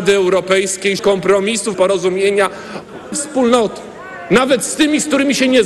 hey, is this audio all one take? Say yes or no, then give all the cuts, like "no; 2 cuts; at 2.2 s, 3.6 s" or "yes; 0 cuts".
no; 3 cuts; at 1.0 s, 1.7 s, 3.1 s